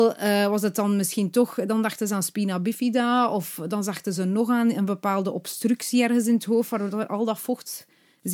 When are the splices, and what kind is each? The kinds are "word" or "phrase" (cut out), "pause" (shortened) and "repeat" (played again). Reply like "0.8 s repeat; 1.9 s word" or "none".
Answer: none